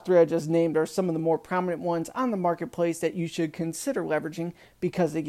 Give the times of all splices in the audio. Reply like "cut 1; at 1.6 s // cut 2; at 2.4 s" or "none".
none